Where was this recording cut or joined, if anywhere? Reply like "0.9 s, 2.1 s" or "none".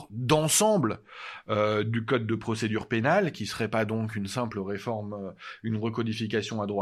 none